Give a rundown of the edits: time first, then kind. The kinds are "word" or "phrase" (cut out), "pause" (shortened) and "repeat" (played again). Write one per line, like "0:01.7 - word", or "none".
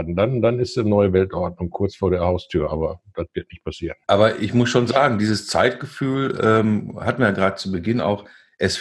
0:04.0 - pause